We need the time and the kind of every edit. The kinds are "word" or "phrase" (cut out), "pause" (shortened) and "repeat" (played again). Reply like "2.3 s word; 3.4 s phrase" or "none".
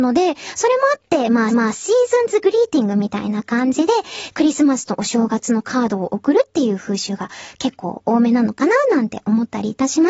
1.5 s repeat